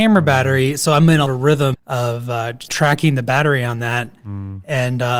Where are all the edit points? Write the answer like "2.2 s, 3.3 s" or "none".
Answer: 1.3 s, 1.7 s, 2.7 s